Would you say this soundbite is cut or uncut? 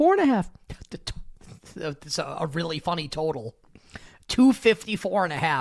uncut